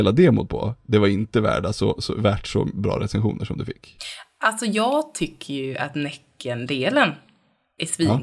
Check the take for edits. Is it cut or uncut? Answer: uncut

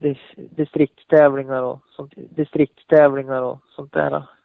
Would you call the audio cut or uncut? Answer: cut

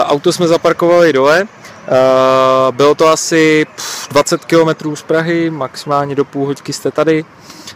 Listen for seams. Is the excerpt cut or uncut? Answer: uncut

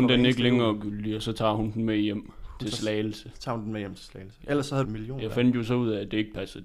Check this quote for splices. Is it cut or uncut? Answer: cut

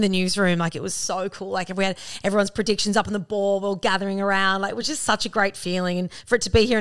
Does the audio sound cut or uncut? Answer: uncut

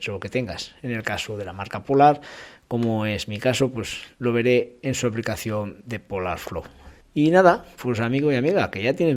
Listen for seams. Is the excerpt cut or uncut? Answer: uncut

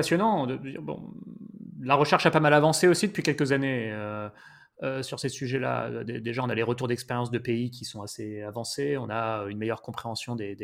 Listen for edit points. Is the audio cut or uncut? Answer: uncut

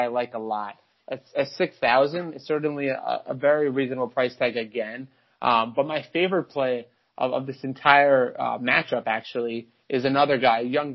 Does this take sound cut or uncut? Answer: uncut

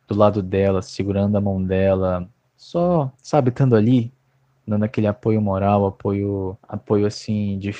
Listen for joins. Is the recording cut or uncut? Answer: cut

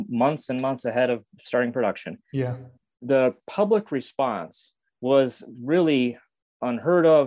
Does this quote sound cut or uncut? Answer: uncut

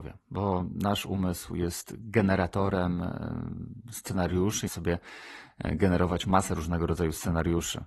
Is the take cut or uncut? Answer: cut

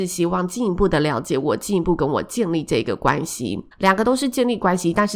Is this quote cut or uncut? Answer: cut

